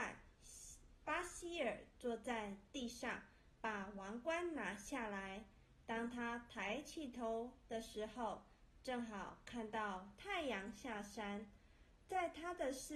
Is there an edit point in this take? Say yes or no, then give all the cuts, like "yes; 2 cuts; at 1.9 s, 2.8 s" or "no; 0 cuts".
no; 0 cuts